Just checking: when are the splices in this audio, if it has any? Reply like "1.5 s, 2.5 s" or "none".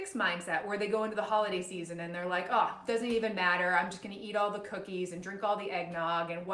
none